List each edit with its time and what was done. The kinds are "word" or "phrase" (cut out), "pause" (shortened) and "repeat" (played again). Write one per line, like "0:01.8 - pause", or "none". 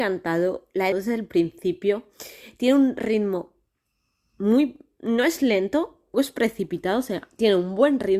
0:00.9 - word
0:06.1 - word